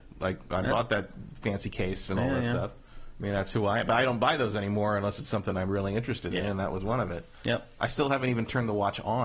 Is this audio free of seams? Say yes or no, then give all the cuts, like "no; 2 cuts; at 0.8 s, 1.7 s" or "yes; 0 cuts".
yes; 0 cuts